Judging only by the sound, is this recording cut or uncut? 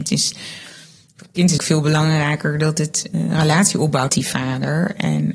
cut